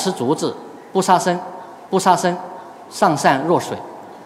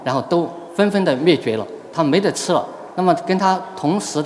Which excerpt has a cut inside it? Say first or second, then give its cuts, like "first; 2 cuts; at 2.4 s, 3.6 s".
first; 1 cut; at 1.9 s